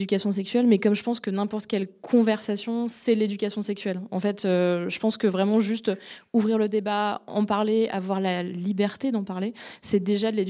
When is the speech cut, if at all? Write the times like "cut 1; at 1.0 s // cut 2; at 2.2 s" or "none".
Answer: none